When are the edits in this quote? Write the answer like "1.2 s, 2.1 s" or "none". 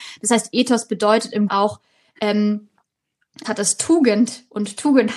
1.5 s, 3.4 s